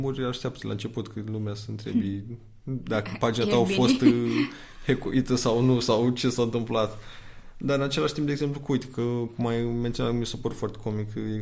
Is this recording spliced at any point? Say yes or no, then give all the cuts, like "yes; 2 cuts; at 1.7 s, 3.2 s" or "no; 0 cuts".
no; 0 cuts